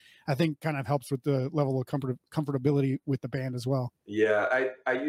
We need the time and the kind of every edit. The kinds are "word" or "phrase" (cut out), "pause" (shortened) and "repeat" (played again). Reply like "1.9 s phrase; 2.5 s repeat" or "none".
4.0 s pause